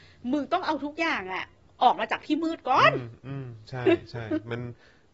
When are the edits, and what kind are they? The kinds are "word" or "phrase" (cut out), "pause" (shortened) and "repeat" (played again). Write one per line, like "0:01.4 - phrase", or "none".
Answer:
none